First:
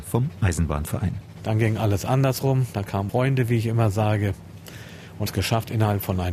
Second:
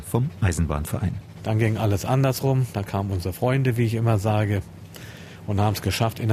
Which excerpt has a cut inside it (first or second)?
first